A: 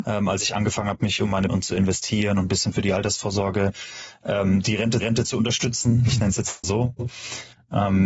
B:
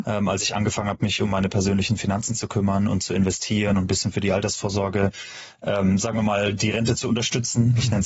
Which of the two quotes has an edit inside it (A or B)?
A